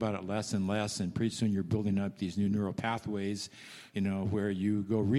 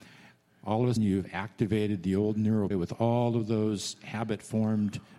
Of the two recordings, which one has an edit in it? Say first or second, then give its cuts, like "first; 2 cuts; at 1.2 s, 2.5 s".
second; 2 cuts; at 1.0 s, 2.7 s